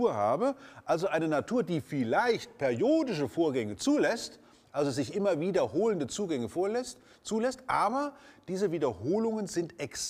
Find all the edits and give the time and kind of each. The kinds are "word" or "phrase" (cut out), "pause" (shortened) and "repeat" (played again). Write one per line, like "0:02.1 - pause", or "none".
none